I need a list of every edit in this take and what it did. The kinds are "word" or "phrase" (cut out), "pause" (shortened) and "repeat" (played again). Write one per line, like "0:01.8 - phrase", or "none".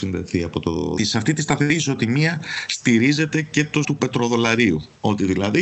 0:01.0 - phrase
0:03.8 - word